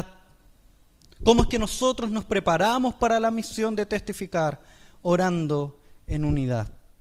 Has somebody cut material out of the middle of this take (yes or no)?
no